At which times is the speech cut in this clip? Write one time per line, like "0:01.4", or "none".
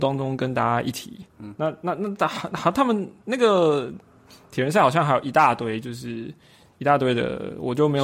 0:01.3